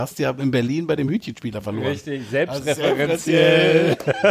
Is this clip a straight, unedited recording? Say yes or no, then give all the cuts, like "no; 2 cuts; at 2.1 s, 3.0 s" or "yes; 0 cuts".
yes; 0 cuts